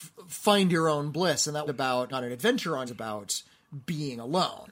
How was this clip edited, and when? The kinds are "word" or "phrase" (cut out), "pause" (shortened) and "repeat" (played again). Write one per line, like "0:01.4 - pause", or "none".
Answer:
0:01.7 - word
0:02.1 - word
0:02.9 - phrase